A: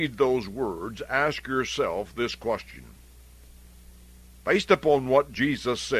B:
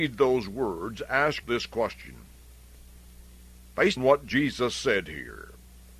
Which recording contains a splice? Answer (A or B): B